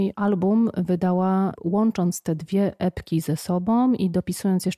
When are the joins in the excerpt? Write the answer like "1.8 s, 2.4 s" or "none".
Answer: none